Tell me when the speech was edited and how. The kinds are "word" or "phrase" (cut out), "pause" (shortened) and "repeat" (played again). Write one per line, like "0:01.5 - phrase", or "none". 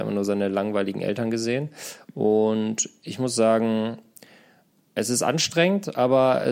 none